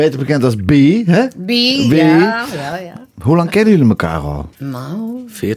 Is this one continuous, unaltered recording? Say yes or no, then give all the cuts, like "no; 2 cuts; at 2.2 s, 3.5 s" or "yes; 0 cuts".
no; 1 cut; at 4.5 s